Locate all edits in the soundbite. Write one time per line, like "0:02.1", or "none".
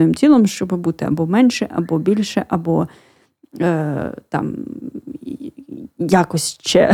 none